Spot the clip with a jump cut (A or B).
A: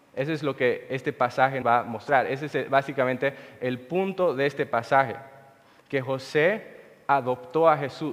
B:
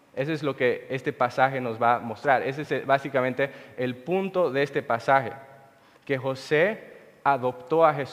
A